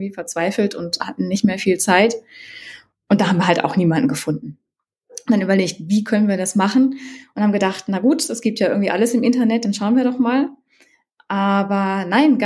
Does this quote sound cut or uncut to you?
uncut